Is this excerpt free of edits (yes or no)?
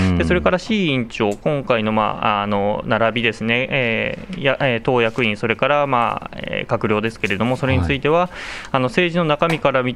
yes